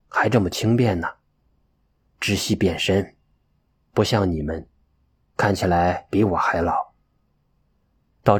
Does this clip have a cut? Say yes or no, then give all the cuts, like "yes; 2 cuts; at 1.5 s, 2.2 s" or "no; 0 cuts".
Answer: no; 0 cuts